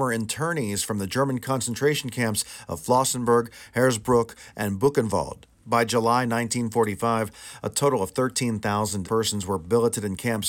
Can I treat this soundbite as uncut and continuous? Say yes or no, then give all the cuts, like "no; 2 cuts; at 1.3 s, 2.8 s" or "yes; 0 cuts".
no; 1 cut; at 9.0 s